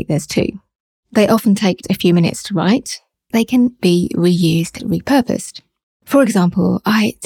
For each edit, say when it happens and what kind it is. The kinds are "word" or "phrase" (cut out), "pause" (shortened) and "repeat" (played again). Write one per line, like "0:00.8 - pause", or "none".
0:01.8 - word
0:03.3 - word
0:03.8 - word
0:04.8 - word